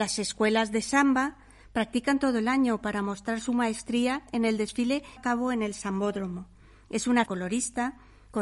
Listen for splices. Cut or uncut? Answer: cut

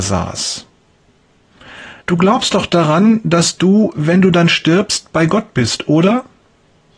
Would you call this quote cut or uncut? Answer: cut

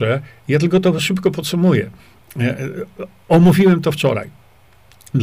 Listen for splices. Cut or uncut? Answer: uncut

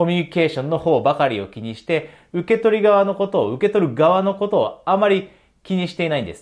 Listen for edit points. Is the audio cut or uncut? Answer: uncut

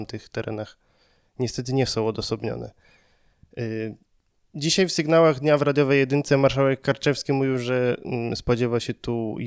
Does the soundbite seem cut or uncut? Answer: uncut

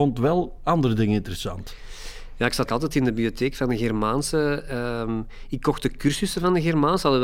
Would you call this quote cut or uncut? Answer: cut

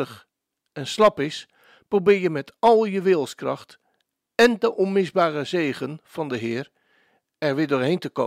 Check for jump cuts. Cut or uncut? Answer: uncut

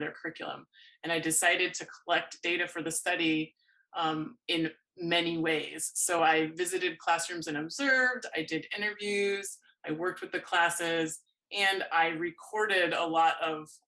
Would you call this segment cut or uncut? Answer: uncut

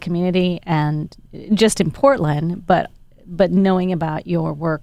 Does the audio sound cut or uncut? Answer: uncut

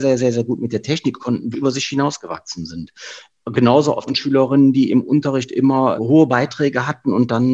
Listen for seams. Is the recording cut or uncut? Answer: cut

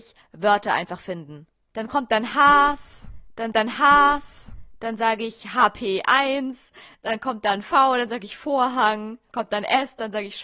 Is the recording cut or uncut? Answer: cut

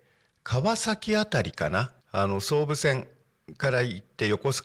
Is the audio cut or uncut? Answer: cut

